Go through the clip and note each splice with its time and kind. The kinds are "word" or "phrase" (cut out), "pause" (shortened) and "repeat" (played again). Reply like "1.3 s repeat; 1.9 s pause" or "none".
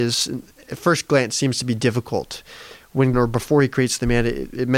3.1 s phrase